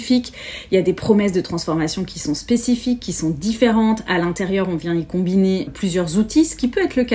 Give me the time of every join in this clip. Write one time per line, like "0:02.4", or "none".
0:05.7